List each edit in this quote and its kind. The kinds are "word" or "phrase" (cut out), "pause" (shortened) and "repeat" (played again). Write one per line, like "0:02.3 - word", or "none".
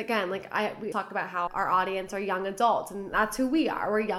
0:00.9 - word
0:01.5 - word